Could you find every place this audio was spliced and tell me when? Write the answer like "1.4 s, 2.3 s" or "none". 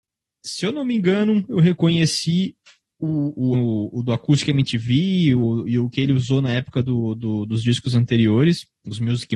3.5 s

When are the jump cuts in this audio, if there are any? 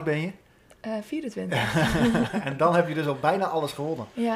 none

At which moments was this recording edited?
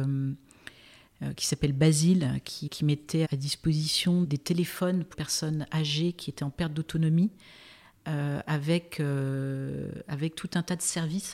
2.7 s, 3.2 s, 4.2 s, 5.1 s

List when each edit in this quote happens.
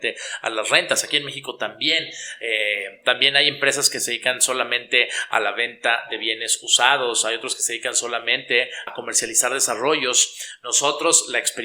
8.9 s

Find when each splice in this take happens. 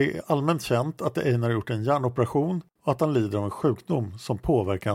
2.7 s

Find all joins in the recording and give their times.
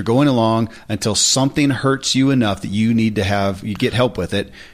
none

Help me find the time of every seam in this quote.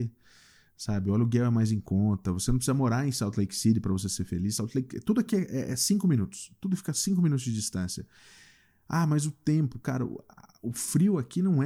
none

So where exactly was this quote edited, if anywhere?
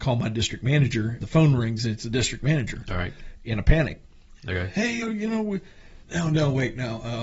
1.2 s, 5.0 s, 6.0 s

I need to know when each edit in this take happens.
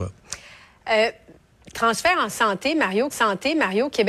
3.1 s

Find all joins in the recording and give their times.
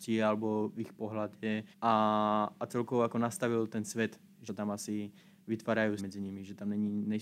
1.7 s, 4.5 s, 6.0 s

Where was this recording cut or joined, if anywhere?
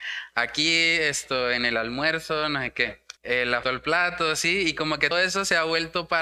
3.2 s, 3.6 s, 5.1 s

